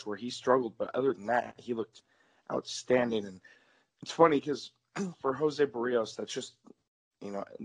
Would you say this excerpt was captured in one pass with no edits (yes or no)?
yes